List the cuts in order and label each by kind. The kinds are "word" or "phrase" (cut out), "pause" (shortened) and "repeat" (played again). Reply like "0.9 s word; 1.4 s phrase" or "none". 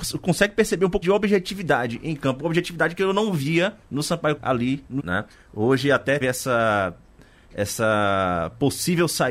1.0 s word; 3.8 s pause; 4.4 s word; 5.0 s word; 5.3 s pause; 6.2 s word